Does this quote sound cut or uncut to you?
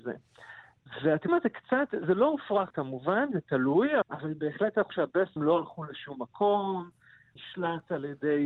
cut